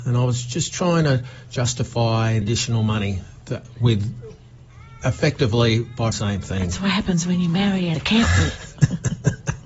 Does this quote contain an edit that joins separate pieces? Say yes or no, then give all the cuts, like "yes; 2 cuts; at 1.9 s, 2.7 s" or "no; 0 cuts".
yes; 3 cuts; at 2.4 s, 6.1 s, 7.9 s